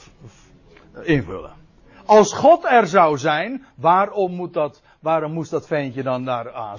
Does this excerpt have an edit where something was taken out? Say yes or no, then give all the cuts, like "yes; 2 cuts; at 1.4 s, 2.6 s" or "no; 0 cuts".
no; 0 cuts